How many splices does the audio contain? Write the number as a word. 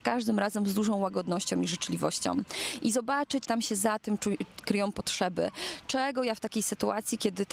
one